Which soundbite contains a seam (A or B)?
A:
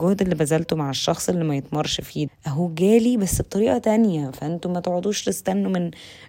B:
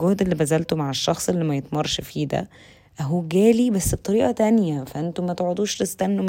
A